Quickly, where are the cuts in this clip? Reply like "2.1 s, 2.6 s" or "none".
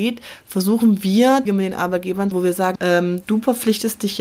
1.5 s, 2.3 s, 2.8 s